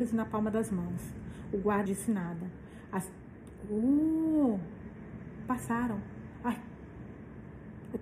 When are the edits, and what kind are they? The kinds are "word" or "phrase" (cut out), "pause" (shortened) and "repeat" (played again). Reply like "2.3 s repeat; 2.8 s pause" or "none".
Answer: 1.9 s word